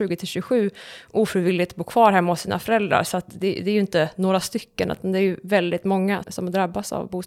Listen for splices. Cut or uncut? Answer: cut